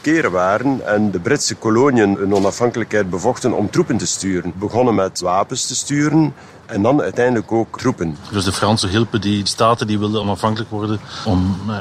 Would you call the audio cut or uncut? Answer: uncut